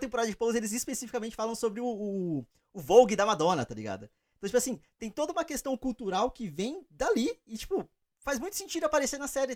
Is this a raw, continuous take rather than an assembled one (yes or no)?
yes